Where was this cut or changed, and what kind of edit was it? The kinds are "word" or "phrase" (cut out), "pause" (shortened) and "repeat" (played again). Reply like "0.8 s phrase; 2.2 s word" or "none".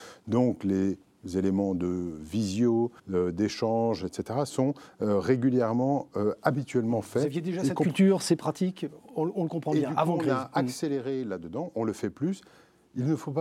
3.0 s pause

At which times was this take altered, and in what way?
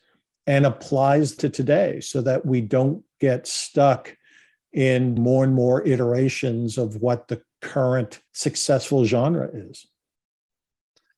1.4 s word; 5.2 s word; 8.3 s pause

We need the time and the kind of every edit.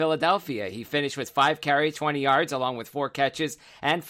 1.9 s word

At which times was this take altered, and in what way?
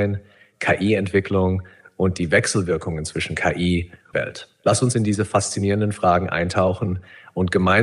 4.1 s phrase

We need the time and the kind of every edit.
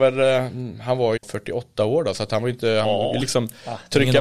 1.2 s word; 3.2 s word

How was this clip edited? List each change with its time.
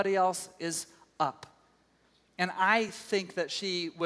none

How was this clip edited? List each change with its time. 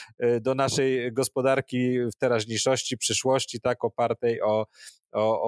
none

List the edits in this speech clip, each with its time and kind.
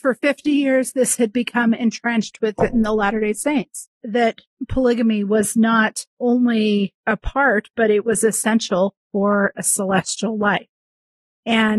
4.0 s pause; 9.6 s phrase

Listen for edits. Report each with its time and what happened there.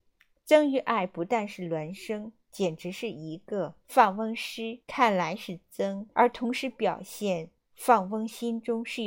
3.8 s pause; 4.8 s pause; 6.1 s pause; 7.7 s pause

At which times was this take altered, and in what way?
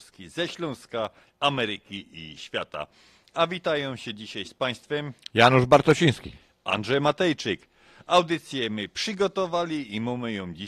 none

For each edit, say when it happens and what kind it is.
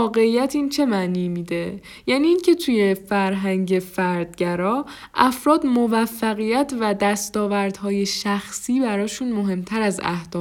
none

